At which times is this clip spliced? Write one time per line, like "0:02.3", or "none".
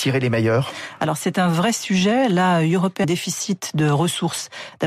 0:03.0